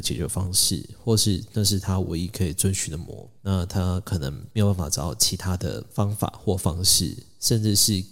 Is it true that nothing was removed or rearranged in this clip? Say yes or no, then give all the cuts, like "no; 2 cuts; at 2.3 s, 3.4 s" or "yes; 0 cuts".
no; 1 cut; at 3.4 s